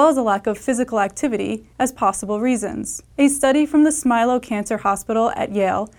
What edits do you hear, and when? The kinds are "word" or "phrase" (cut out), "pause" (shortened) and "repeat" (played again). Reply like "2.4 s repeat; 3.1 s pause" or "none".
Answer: 1.7 s pause; 3.1 s pause